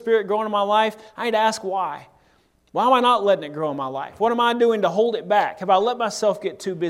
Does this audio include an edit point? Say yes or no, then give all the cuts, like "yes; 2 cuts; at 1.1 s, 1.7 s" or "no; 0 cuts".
no; 0 cuts